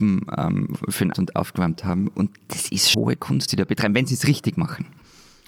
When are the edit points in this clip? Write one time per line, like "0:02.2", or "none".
0:01.1
0:02.9
0:03.5